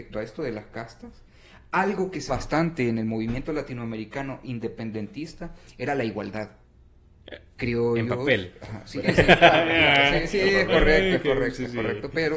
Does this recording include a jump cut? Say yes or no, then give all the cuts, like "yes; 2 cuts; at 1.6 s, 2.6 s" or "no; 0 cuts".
yes; 2 cuts; at 2.3 s, 9.0 s